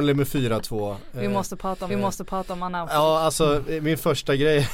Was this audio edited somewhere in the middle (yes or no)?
yes